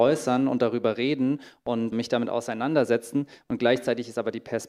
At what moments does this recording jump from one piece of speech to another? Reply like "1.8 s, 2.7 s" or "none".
1.9 s